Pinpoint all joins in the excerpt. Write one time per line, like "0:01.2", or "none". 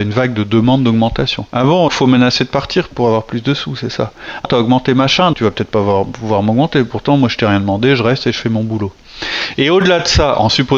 0:01.5
0:01.9
0:04.4
0:05.3

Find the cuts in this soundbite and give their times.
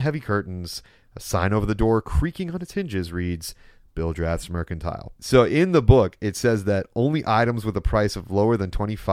0:05.2

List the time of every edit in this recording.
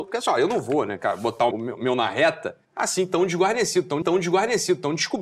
0:01.5
0:02.6
0:04.0

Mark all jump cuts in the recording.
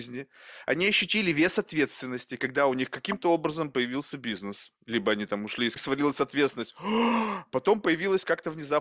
0:05.8

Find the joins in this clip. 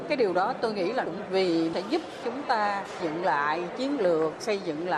0:01.3
0:02.2
0:03.0

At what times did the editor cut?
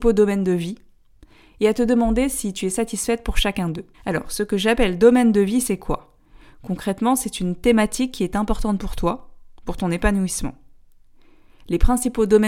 0:03.9

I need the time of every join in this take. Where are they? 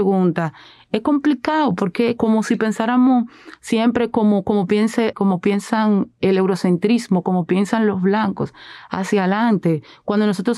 0:02.2
0:05.1

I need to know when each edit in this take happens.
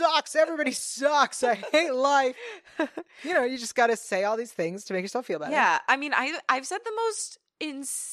none

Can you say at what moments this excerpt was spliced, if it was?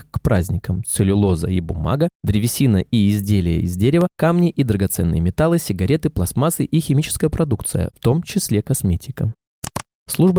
none

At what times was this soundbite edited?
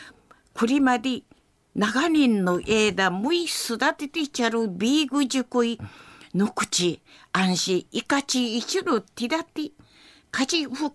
none

